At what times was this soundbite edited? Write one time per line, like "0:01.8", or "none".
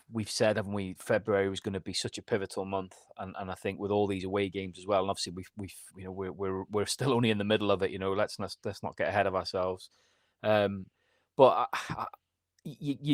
0:05.9